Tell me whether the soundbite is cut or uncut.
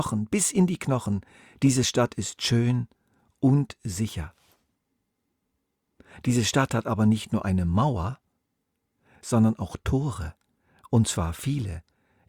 uncut